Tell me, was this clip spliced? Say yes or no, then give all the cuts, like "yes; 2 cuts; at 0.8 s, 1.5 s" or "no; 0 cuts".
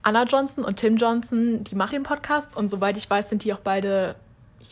yes; 1 cut; at 1.9 s